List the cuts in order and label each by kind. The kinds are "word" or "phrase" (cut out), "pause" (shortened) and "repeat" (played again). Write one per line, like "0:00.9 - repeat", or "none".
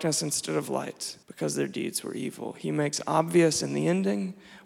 0:01.2 - pause